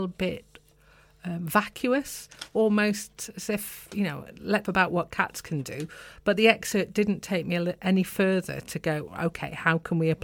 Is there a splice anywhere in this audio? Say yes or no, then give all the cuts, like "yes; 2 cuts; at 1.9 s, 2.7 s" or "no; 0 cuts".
yes; 1 cut; at 4.7 s